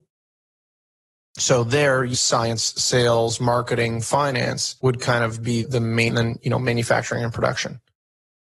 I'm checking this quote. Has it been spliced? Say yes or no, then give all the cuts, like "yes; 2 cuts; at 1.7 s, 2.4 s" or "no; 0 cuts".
yes; 4 cuts; at 2.1 s, 4.8 s, 5.6 s, 6.1 s